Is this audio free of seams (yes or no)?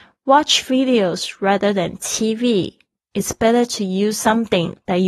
yes